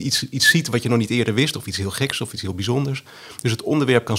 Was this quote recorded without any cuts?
yes; 0 cuts

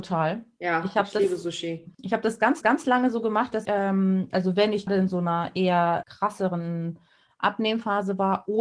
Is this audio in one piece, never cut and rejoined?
no; 5 cuts; at 1.9 s, 2.6 s, 3.6 s, 4.9 s, 6.0 s

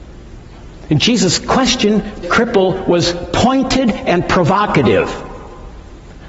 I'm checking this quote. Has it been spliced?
yes; 1 cut; at 2.2 s

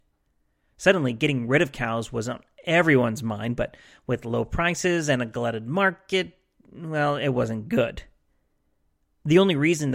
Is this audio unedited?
yes; 0 cuts

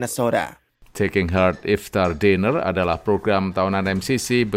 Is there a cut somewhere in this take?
no; 0 cuts

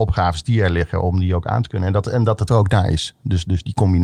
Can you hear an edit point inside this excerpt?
yes; 1 cut; at 2.5 s

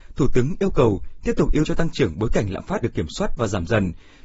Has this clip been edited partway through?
yes; 2 cuts; at 1.6 s, 2.8 s

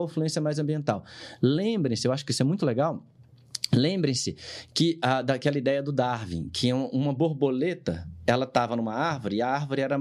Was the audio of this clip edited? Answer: no; 0 cuts

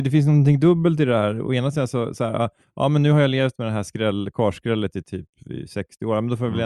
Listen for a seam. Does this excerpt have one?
no; 0 cuts

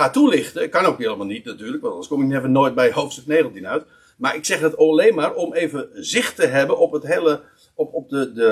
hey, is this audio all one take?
yes; 0 cuts

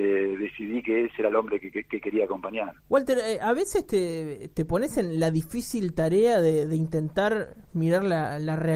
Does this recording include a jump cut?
yes; 1 cut; at 2.8 s

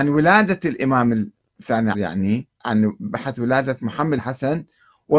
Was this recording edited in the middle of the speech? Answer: yes; 3 cuts; at 1.9 s, 2.5 s, 4.2 s

